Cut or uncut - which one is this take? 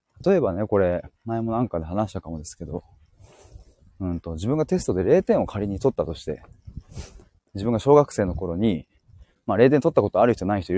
uncut